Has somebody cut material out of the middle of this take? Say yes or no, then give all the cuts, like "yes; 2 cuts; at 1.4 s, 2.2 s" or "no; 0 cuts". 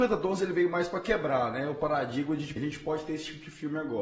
yes; 1 cut; at 2.6 s